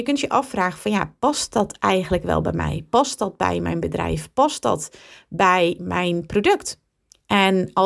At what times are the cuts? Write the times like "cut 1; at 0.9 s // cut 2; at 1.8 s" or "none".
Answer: none